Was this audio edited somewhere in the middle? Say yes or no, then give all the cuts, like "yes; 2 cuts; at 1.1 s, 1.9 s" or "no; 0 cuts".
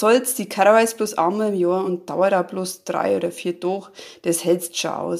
no; 0 cuts